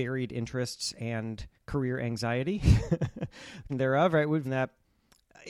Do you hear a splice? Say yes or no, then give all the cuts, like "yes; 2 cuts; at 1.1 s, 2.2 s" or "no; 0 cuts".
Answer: yes; 3 cuts; at 1.6 s, 3.7 s, 4.4 s